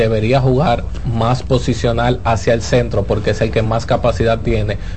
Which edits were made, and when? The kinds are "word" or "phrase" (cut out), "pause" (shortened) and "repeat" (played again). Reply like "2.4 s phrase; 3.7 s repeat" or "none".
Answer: none